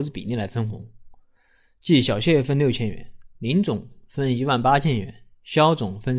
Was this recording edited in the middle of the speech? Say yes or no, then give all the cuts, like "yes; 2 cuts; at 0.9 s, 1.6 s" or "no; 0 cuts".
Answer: no; 0 cuts